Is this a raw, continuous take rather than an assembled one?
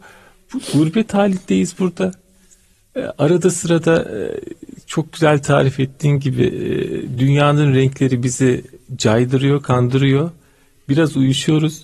yes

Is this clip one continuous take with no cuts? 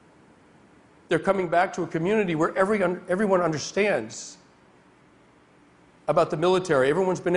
yes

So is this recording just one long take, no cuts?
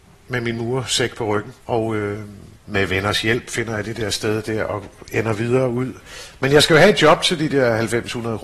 no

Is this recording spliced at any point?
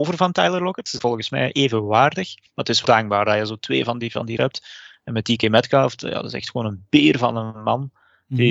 yes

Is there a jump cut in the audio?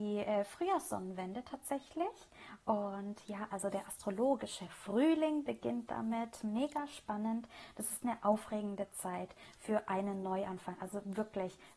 no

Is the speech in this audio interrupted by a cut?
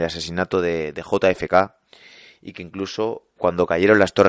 yes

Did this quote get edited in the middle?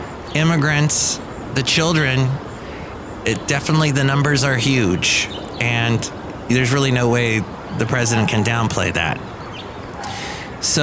no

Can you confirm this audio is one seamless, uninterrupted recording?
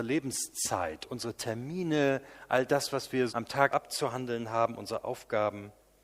no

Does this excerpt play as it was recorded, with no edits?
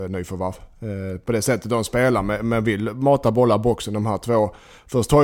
yes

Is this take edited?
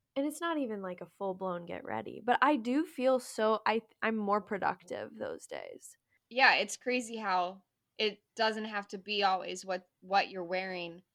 no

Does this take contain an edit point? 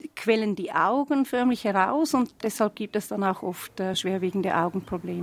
no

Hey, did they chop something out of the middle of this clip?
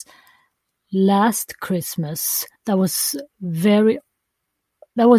yes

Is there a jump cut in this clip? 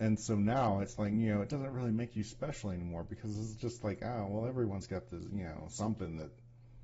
no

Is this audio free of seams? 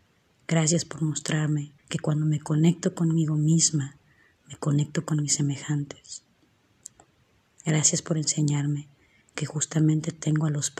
no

